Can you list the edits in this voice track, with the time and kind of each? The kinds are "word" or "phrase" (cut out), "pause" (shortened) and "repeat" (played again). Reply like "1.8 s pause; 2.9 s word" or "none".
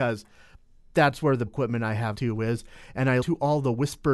1.5 s phrase; 2.1 s word; 3.2 s word